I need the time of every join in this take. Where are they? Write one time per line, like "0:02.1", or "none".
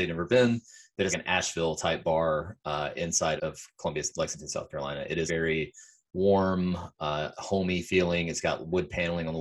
0:01.1
0:03.4
0:05.3